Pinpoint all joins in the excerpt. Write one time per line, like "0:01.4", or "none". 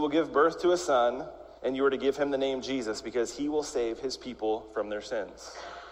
0:01.6